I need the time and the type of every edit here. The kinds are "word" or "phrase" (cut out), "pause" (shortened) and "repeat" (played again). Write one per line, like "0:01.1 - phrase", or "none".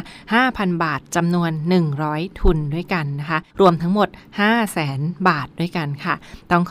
0:03.5 - pause